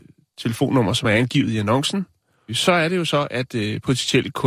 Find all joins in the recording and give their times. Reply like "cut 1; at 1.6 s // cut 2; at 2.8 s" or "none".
none